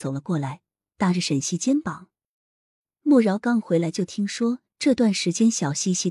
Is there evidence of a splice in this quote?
no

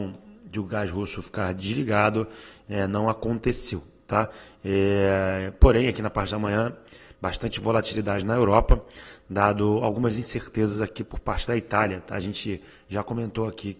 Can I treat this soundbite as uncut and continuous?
yes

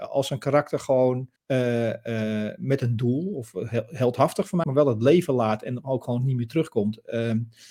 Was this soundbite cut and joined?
yes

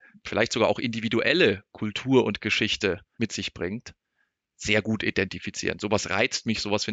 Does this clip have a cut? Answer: no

